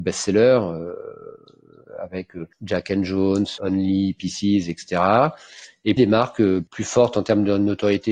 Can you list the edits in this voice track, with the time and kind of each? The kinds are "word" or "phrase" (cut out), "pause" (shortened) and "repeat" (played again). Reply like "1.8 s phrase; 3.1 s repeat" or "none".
3.6 s word; 6.0 s word